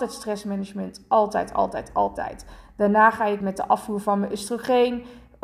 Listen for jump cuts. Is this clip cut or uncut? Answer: cut